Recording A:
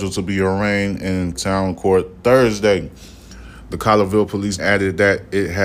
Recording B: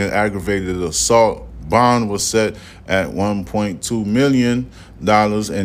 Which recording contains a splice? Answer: A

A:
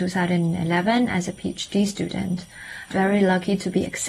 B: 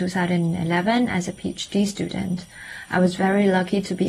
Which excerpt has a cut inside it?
A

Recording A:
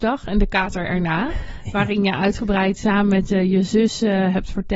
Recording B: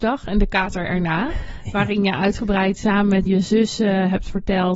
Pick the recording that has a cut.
B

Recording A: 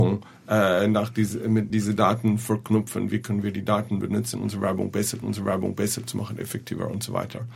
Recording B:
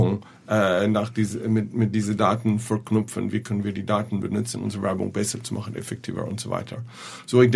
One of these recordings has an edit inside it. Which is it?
A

